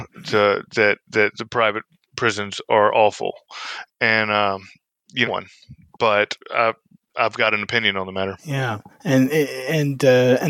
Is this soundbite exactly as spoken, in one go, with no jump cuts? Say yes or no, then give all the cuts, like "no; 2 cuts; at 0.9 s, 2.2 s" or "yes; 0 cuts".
no; 2 cuts; at 5.3 s, 6.4 s